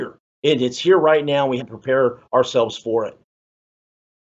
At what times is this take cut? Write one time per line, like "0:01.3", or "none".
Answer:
0:01.6